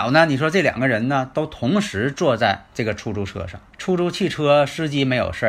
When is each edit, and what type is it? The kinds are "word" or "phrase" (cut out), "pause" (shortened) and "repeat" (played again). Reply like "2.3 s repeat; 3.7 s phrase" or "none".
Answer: 3.7 s pause